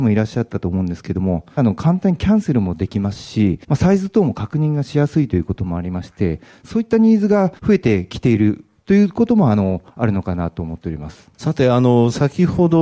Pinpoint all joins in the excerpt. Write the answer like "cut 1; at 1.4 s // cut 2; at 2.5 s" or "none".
cut 1; at 1.6 s // cut 2; at 3.6 s // cut 3; at 7.6 s // cut 4; at 11.3 s